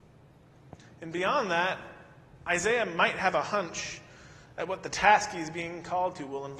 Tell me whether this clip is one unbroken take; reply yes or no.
yes